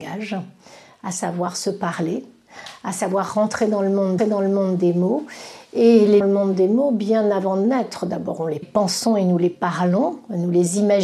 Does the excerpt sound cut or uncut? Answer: cut